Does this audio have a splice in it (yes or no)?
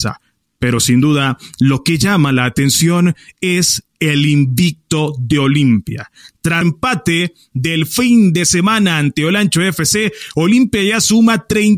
yes